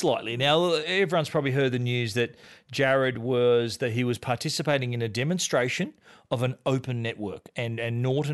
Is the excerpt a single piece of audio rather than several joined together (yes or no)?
yes